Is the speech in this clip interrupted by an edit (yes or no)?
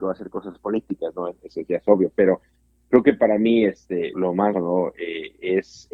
yes